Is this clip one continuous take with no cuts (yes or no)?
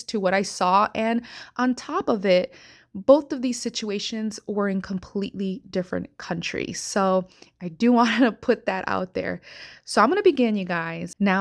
yes